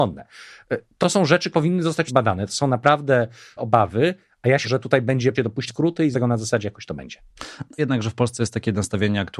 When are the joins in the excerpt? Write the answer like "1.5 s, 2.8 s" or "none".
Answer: 1.0 s, 1.5 s, 2.1 s, 3.6 s, 4.6 s, 5.3 s, 5.7 s, 6.1 s, 7.8 s